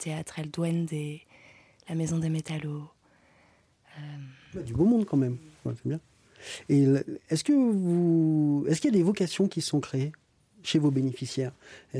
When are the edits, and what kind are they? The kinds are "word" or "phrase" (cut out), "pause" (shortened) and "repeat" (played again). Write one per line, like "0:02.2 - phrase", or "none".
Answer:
none